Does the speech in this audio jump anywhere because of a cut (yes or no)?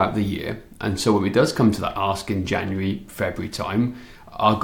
no